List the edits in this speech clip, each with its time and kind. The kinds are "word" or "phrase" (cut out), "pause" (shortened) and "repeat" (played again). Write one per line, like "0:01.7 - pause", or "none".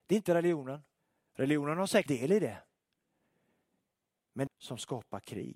0:01.0 - pause
0:02.1 - word
0:04.5 - phrase